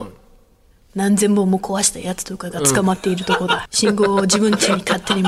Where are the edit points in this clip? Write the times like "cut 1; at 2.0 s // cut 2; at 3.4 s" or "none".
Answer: cut 1; at 3.7 s